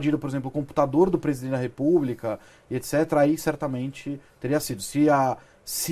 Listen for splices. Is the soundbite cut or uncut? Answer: uncut